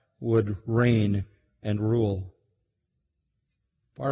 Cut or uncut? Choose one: uncut